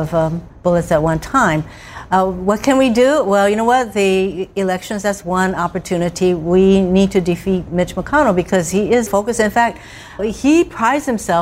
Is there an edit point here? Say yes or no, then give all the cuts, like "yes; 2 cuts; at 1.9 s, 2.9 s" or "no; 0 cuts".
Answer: yes; 2 cuts; at 9.1 s, 10.2 s